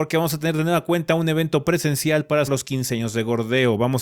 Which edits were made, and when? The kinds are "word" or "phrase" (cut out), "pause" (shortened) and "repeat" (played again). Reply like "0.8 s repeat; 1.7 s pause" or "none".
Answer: 2.5 s word